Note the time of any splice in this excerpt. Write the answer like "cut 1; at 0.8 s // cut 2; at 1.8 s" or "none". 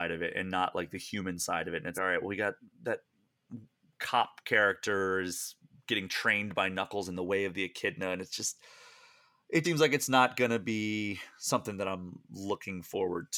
cut 1; at 1.9 s // cut 2; at 9.6 s